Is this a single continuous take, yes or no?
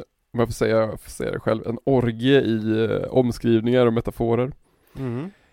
yes